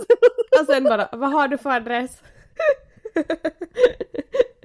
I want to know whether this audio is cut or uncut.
uncut